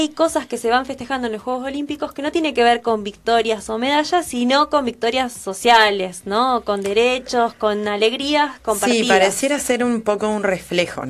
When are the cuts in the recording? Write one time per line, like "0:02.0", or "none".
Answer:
none